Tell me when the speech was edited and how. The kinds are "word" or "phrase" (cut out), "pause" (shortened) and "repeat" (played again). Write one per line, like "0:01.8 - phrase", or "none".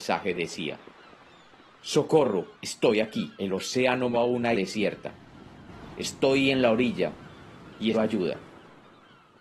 0:02.5 - pause
0:03.3 - pause
0:04.1 - word
0:04.5 - word
0:07.9 - word